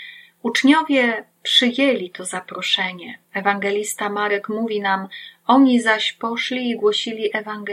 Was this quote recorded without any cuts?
no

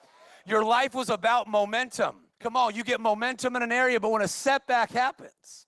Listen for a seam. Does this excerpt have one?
yes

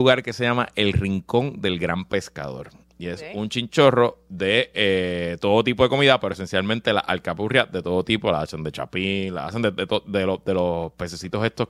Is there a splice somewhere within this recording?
no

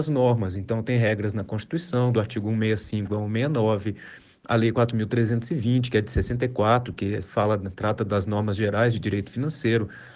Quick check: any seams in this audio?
no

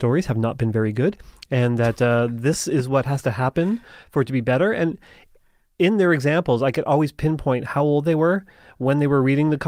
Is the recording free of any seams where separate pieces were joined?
yes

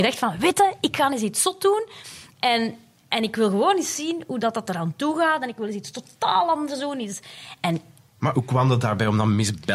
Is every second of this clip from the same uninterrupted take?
yes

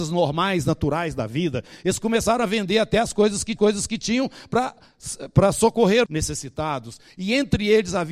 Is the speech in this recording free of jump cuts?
no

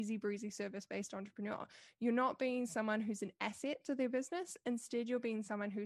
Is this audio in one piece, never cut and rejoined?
yes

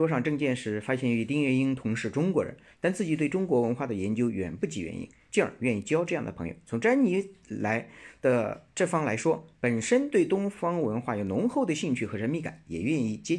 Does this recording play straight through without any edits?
yes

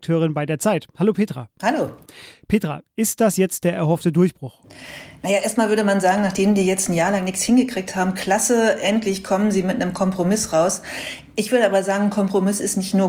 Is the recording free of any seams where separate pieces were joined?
yes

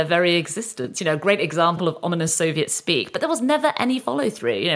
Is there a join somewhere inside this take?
no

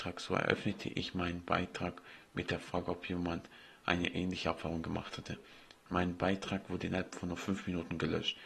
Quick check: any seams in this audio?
no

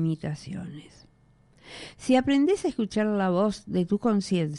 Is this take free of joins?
yes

